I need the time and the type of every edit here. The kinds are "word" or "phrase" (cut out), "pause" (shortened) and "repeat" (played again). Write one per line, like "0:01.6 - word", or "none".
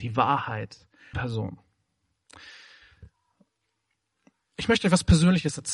0:01.1 - word